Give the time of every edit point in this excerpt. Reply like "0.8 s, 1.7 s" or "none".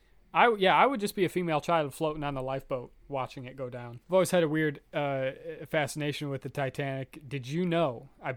3.0 s, 4.0 s

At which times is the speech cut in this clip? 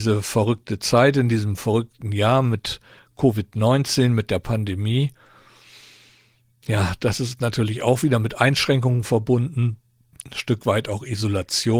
none

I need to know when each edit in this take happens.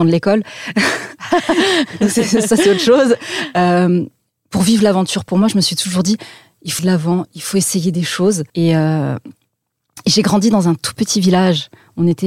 6.8 s, 8.5 s

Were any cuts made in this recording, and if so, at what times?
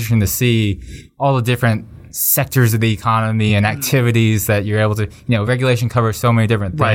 none

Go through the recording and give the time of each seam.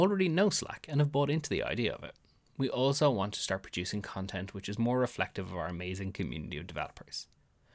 none

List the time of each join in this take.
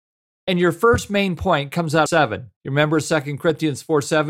2.1 s, 2.6 s

